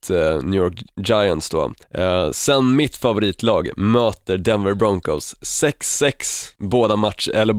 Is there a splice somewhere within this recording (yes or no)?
yes